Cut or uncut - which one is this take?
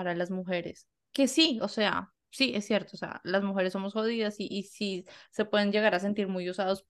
uncut